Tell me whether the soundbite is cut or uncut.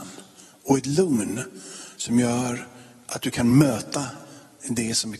uncut